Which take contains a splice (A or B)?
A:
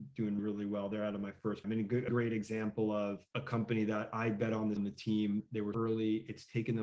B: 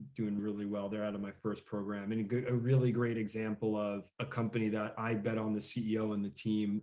A